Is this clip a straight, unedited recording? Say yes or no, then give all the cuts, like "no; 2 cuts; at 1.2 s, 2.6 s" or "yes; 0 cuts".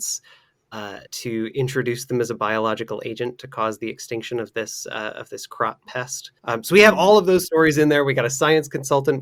no; 2 cuts; at 1.1 s, 6.4 s